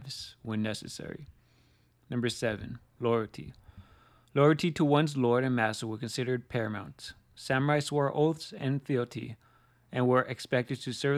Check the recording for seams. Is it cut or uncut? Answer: uncut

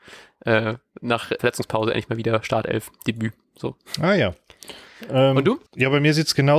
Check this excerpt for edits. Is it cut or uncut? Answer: cut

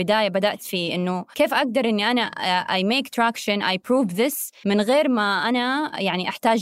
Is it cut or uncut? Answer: uncut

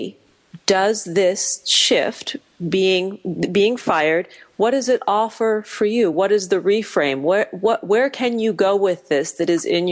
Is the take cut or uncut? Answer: uncut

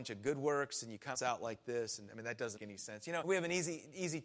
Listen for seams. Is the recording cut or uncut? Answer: cut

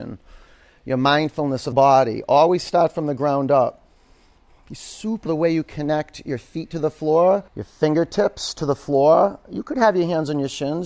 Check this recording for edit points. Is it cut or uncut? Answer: cut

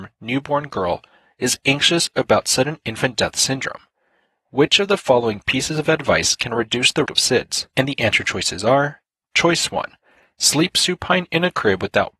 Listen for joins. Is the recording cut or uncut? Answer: cut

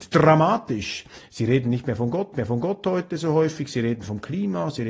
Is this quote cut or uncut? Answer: cut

